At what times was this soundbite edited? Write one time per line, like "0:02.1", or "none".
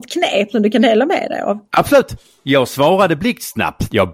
none